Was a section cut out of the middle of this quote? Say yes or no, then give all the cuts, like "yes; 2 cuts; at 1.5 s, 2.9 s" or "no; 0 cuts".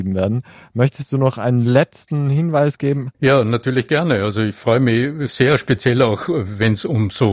yes; 1 cut; at 3.1 s